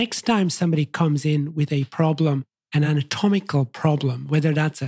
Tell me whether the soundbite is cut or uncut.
uncut